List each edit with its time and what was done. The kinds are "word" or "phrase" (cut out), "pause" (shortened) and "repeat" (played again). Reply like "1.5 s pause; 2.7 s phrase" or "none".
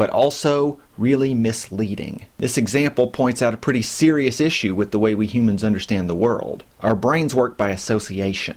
2.3 s pause; 6.7 s pause